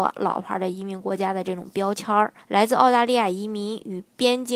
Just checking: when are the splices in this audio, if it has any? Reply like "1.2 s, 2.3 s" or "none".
2.4 s